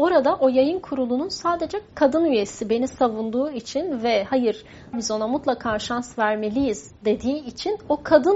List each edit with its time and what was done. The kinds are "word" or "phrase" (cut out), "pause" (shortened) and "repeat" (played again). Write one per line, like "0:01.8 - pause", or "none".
0:01.9 - word
0:04.9 - phrase